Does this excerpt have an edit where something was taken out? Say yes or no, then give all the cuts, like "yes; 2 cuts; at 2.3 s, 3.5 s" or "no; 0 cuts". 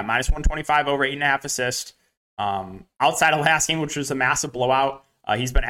no; 0 cuts